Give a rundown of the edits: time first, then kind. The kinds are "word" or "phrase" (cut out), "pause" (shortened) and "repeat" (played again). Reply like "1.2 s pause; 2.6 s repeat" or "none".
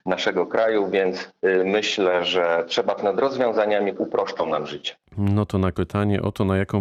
3.0 s word; 4.0 s word; 5.7 s word